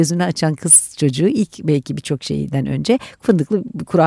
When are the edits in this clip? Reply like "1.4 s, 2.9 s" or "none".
none